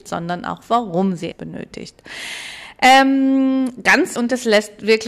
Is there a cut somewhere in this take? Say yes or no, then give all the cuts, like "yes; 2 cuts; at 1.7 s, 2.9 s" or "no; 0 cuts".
yes; 2 cuts; at 1.3 s, 4.2 s